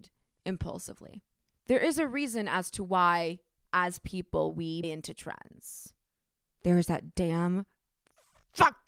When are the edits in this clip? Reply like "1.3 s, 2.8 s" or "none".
4.8 s